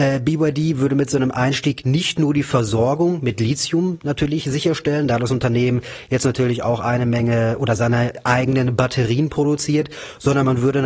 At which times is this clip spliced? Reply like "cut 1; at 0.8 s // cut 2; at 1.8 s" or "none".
none